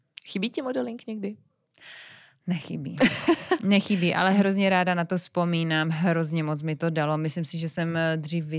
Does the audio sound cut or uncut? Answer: uncut